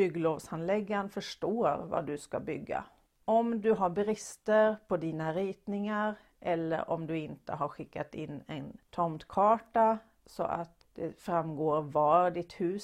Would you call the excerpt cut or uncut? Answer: uncut